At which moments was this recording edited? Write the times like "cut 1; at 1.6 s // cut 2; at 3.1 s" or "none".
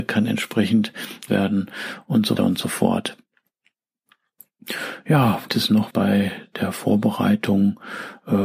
cut 1; at 1.3 s // cut 2; at 2.4 s // cut 3; at 5.5 s // cut 4; at 5.9 s